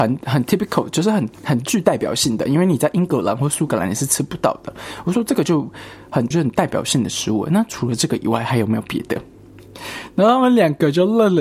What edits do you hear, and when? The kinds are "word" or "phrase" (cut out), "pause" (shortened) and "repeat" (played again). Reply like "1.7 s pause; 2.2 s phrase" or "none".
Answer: 6.3 s word

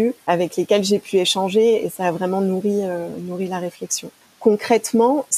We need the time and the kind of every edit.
none

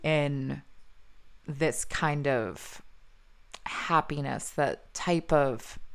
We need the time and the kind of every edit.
1.4 s pause

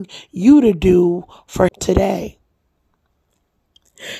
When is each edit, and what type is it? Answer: 1.7 s word

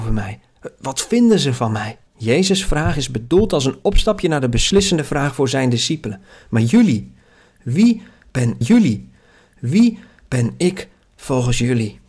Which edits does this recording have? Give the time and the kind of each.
2.1 s pause; 8.6 s repeat

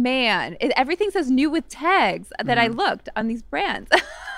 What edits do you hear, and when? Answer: none

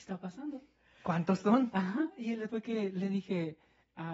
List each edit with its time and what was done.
2.5 s word

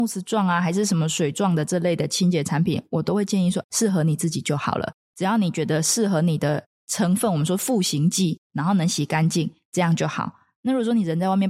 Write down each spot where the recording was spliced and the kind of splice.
3.6 s word

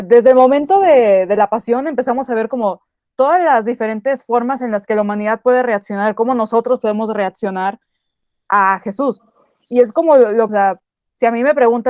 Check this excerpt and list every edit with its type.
10.5 s phrase

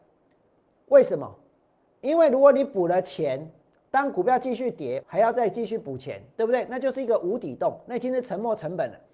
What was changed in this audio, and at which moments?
5.0 s word

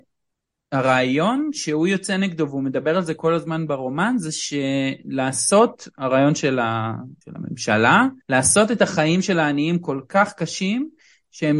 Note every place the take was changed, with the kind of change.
7.2 s pause; 8.2 s pause

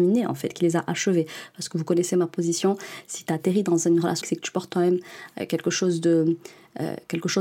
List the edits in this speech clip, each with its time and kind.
4.2 s word

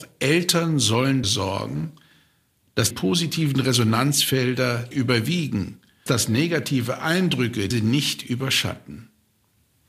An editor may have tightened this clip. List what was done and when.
1.2 s word; 2.9 s word; 4.9 s word; 6.1 s word; 7.7 s word

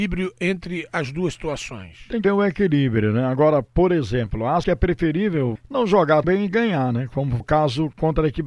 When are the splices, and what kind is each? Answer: 2.2 s word; 4.6 s word; 5.6 s word; 6.2 s word; 7.4 s word

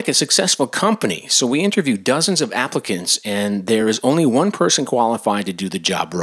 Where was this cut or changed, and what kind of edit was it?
none

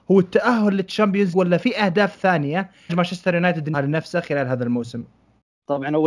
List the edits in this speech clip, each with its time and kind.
1.3 s word; 2.9 s word; 3.7 s word

